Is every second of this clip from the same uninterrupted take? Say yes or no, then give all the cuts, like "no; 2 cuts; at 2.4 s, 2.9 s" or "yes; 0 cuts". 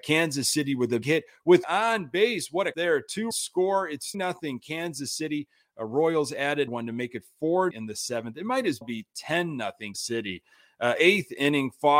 no; 9 cuts; at 1.0 s, 1.6 s, 2.7 s, 3.3 s, 4.1 s, 6.7 s, 7.7 s, 8.8 s, 9.9 s